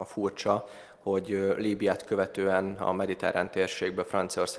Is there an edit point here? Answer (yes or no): no